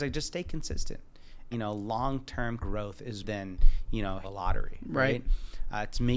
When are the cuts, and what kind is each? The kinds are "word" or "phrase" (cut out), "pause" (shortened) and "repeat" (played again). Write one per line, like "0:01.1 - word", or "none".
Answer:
0:01.5 - word
0:02.6 - word
0:03.2 - word
0:04.2 - word

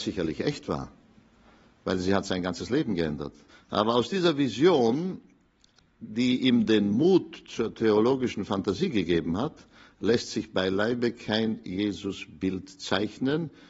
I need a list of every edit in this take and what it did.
0:03.5 - pause

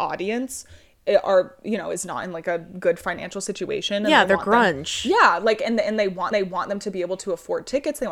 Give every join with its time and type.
0:06.3 - repeat

